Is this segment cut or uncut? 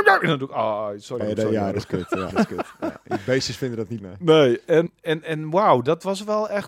cut